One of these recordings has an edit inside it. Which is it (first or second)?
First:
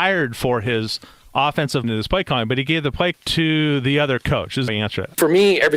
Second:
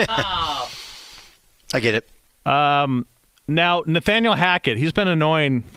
first